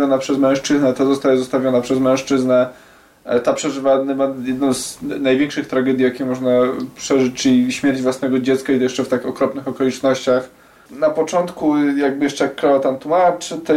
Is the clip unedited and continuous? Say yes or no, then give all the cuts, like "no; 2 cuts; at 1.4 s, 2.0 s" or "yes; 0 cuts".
yes; 0 cuts